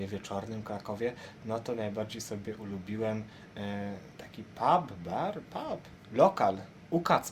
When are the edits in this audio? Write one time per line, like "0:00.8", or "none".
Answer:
0:04.1
0:05.9